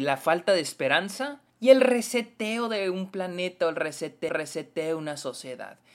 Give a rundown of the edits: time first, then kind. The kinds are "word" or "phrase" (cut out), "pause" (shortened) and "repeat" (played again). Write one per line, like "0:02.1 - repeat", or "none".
0:01.5 - pause
0:04.3 - repeat